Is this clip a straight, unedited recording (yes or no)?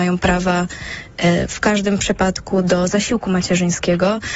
yes